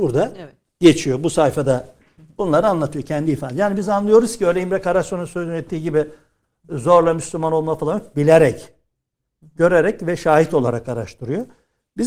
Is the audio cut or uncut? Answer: uncut